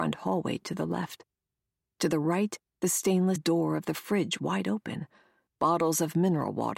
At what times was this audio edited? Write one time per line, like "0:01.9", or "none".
0:03.4
0:04.4